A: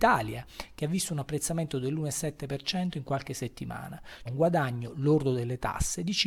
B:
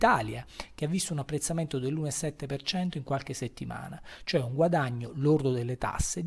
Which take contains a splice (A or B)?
A